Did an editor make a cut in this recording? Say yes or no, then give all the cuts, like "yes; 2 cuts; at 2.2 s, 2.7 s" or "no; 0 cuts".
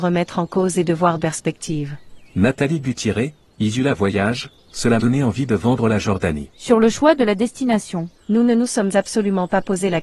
yes; 4 cuts; at 1.2 s, 5.0 s, 6.5 s, 8.1 s